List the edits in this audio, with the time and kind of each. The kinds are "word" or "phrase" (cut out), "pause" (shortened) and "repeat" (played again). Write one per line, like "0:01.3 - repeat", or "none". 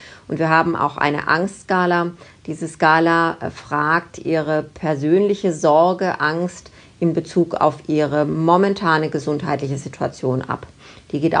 none